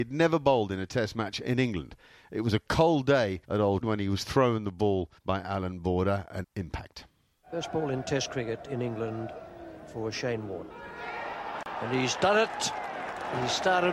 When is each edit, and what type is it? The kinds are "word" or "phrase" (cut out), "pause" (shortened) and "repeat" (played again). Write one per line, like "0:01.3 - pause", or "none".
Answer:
0:03.4 - pause
0:03.8 - word
0:05.2 - pause
0:06.4 - phrase